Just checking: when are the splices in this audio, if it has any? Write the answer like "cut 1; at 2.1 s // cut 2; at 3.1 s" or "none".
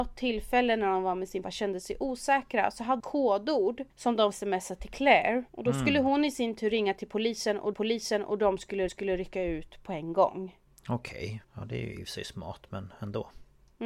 cut 1; at 1.4 s // cut 2; at 3.0 s // cut 3; at 3.9 s // cut 4; at 4.3 s // cut 5; at 5.5 s // cut 6; at 7.7 s // cut 7; at 8.9 s // cut 8; at 10.7 s // cut 9; at 11.4 s